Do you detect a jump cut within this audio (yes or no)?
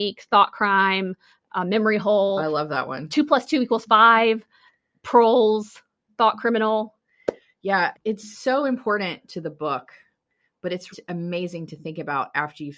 yes